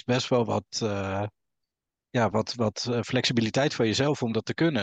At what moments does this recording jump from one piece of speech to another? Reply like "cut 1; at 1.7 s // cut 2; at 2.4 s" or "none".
none

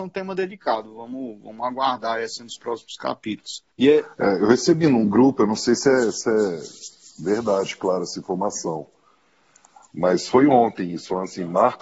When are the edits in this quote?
cut 1; at 3.7 s

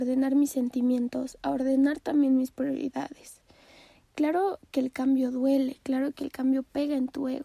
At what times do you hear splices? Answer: none

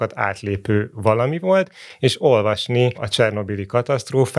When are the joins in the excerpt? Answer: none

